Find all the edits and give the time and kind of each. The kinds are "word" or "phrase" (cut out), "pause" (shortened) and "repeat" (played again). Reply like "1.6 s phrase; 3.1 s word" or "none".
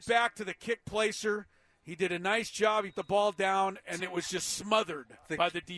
2.9 s word; 4.0 s word